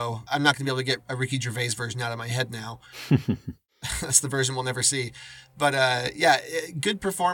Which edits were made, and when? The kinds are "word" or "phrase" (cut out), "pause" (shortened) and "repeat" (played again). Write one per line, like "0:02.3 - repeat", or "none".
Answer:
none